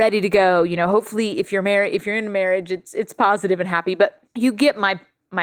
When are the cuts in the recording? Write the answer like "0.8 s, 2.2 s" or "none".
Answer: 4.2 s